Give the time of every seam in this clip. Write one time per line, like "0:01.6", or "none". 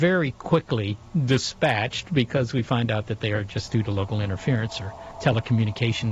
none